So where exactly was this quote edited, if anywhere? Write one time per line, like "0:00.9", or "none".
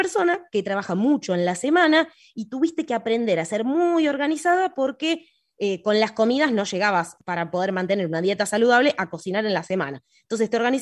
none